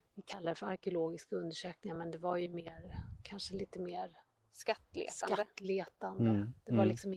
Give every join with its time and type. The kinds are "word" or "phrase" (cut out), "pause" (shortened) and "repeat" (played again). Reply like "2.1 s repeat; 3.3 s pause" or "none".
none